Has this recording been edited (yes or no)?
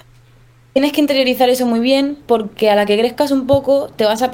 no